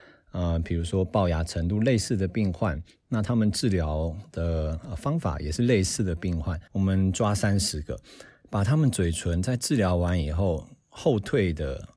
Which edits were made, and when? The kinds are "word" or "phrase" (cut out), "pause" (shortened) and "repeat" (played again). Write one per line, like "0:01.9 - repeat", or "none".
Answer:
0:06.7 - pause